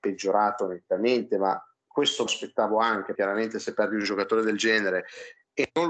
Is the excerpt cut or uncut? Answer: cut